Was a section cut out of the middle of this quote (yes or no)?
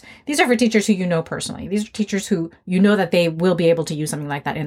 no